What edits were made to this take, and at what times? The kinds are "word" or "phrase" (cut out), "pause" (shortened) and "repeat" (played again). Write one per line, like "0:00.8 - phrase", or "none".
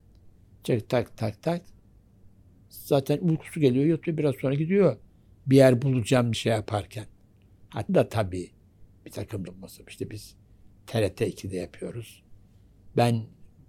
0:01.1 - word
0:06.3 - word
0:07.9 - word
0:09.5 - word